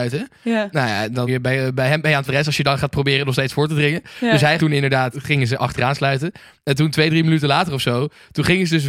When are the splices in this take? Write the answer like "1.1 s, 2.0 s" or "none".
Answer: 1.3 s, 2.3 s, 4.6 s, 5.1 s